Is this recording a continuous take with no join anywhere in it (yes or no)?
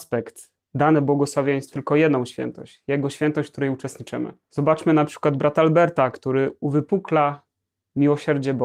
no